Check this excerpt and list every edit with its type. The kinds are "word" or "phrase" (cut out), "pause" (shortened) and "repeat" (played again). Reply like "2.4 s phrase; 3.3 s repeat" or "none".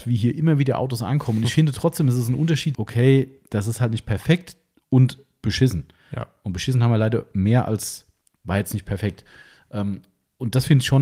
2.7 s word